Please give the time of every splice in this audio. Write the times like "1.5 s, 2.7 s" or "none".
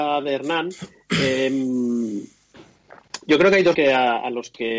3.7 s